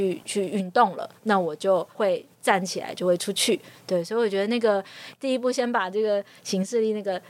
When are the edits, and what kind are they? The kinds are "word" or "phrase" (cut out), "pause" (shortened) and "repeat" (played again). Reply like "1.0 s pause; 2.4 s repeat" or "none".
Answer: 2.3 s pause